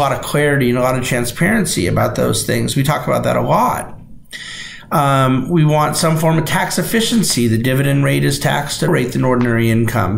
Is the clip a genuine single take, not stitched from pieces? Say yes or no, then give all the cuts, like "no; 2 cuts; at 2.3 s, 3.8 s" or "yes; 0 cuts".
no; 1 cut; at 8.9 s